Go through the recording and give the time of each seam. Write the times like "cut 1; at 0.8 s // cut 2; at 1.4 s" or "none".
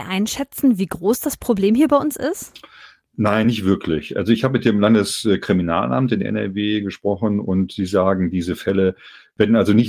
none